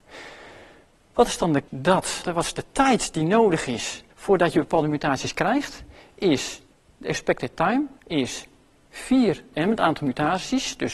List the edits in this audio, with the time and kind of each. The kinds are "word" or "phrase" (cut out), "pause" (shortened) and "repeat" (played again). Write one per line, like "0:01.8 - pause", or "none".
0:01.7 - word
0:02.2 - word
0:04.1 - pause
0:06.7 - pause
0:08.0 - pause
0:09.5 - phrase